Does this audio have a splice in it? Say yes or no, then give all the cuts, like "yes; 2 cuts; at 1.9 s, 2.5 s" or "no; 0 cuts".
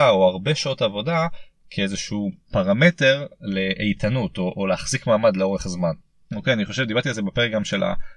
no; 0 cuts